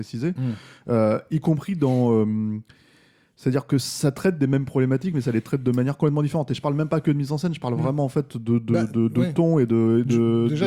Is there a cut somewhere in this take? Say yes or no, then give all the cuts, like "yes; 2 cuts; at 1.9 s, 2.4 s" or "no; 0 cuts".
no; 0 cuts